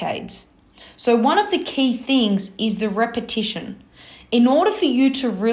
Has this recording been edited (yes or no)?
no